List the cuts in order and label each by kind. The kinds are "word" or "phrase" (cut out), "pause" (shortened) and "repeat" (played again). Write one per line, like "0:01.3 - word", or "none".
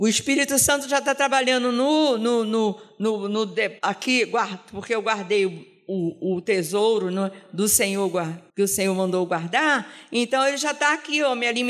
0:03.8 - pause
0:08.5 - pause